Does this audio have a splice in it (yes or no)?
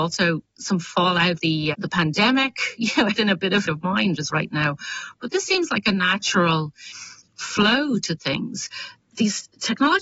yes